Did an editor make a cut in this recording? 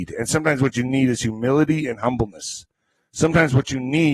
no; 0 cuts

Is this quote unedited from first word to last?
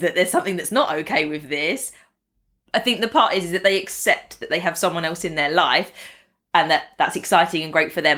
yes; 0 cuts

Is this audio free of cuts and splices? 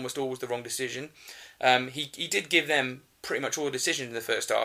yes; 0 cuts

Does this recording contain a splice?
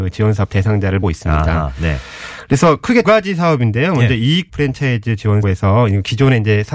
yes; 4 cuts; at 1.0 s, 3.0 s, 4.5 s, 5.4 s

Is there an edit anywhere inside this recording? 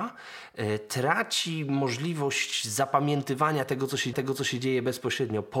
yes; 1 cut; at 4.1 s

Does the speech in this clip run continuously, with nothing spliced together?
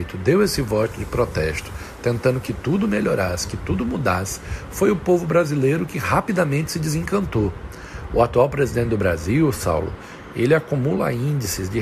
yes; 0 cuts

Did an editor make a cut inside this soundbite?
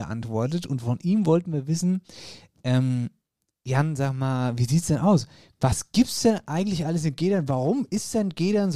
no; 0 cuts

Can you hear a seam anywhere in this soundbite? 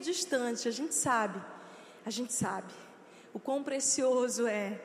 no; 0 cuts

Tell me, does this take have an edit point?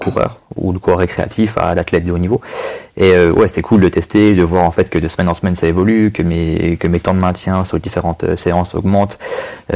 no; 0 cuts

